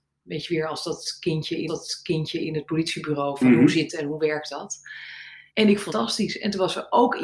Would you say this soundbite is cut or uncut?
cut